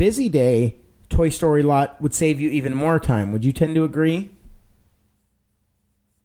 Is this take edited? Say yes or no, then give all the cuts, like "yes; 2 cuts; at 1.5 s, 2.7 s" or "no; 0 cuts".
no; 0 cuts